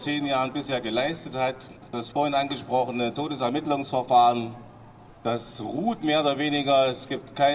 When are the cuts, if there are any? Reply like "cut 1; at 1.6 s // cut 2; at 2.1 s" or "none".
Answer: cut 1; at 5.1 s